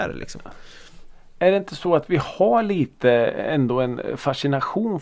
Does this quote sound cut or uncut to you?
uncut